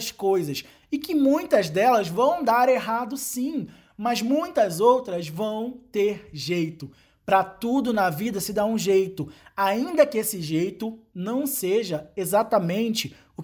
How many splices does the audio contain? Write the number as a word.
zero